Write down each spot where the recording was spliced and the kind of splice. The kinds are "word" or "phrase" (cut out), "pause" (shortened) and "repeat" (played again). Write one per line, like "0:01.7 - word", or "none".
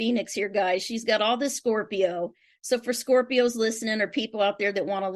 none